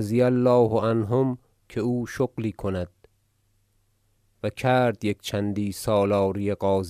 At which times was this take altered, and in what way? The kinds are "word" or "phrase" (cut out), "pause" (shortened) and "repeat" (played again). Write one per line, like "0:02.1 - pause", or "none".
none